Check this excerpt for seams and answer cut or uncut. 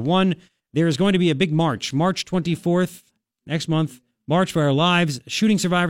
uncut